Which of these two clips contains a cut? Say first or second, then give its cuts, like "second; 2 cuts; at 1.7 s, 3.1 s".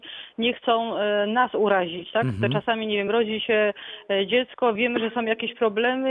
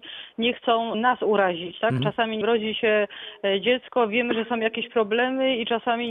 second; 3 cuts; at 0.9 s, 2.0 s, 2.4 s